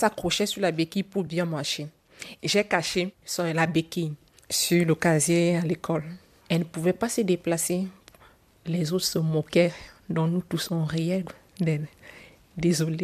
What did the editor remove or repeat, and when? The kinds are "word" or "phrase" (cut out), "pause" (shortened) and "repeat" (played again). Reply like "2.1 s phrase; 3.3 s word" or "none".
none